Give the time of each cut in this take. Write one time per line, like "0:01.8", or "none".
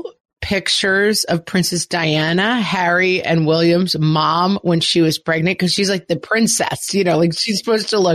none